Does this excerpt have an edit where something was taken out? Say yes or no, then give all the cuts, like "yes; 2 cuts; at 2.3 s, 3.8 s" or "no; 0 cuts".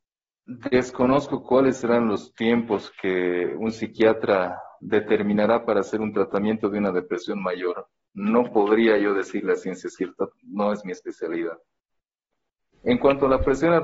no; 0 cuts